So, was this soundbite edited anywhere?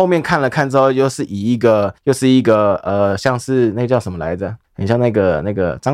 yes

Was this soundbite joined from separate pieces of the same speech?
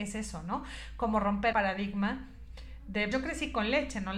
yes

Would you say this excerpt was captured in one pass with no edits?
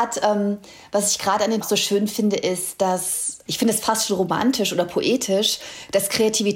no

